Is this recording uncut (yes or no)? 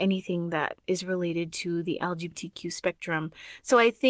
yes